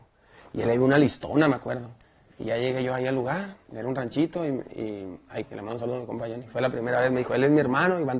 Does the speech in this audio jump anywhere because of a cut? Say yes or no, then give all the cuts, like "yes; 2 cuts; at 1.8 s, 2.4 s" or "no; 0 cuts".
yes; 1 cut; at 5.4 s